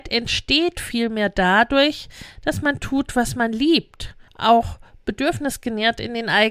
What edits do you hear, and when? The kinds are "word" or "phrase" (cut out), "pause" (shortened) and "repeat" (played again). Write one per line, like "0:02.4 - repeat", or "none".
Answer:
0:04.3 - pause

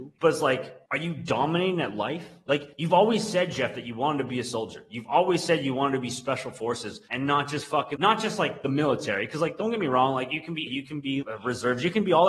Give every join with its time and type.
0:08.0 - word
0:10.7 - word
0:11.2 - word

